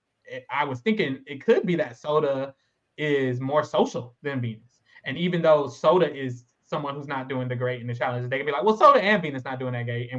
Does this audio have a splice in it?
no; 0 cuts

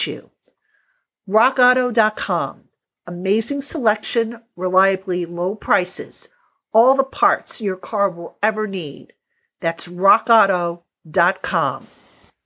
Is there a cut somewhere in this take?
no; 0 cuts

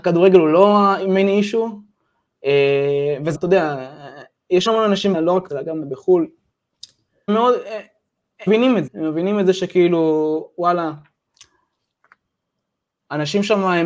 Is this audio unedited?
no; 8 cuts; at 3.3 s, 4.7 s, 5.1 s, 5.5 s, 5.8 s, 7.3 s, 8.5 s, 8.9 s

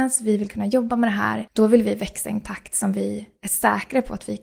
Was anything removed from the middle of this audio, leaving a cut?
no; 0 cuts

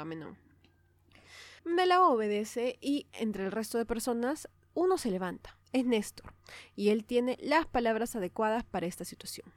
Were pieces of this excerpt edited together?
yes; 2 cuts; at 1.6 s, 5.6 s

